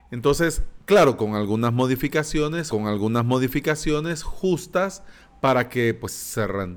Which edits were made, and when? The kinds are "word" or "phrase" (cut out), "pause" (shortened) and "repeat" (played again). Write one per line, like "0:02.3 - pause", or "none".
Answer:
0:02.7 - repeat